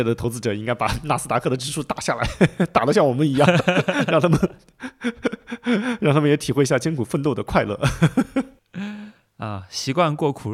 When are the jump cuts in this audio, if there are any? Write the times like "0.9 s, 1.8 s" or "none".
none